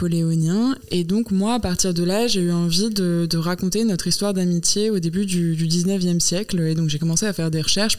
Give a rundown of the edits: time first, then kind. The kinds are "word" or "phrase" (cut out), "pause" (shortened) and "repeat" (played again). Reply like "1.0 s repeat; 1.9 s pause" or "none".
none